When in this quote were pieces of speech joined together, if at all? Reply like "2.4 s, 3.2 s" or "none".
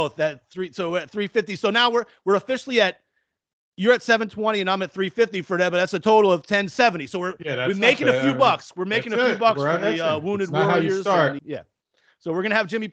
11.4 s